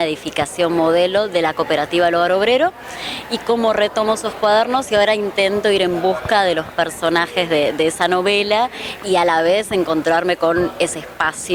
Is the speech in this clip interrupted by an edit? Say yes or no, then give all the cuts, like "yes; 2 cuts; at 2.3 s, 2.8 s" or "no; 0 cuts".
no; 0 cuts